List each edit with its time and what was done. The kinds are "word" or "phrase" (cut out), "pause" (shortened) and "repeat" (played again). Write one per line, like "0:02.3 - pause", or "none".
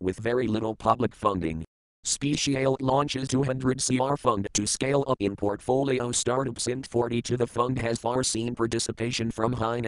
0:02.8 - word
0:03.3 - word
0:05.2 - word
0:08.0 - word